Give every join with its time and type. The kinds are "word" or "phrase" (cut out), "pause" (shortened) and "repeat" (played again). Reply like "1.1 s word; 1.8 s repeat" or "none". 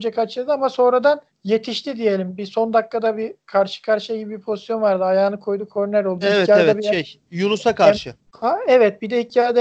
1.3 s pause; 3.4 s pause; 8.3 s pause